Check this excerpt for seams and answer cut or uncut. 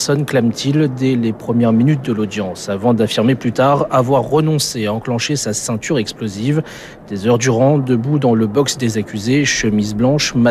uncut